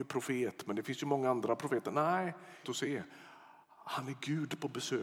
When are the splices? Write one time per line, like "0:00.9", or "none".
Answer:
0:02.6